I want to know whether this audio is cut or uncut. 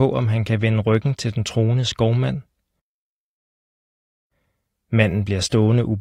uncut